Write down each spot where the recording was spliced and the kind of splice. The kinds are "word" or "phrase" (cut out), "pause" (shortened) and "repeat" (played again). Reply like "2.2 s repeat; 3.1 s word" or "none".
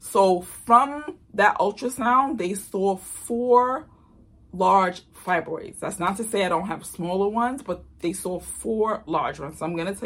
none